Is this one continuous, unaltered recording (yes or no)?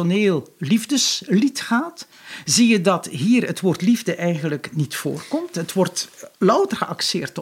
no